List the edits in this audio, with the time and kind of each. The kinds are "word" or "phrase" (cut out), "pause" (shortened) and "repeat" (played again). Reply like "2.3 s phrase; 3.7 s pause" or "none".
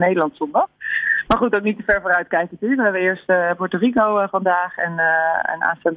1.5 s phrase